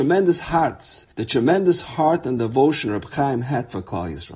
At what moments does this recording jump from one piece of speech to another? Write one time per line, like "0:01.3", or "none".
0:01.1